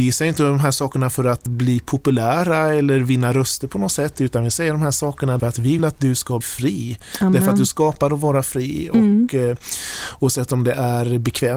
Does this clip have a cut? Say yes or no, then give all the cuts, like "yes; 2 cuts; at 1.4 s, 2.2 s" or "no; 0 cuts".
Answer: yes; 4 cuts; at 1.5 s, 5.4 s, 5.8 s, 6.4 s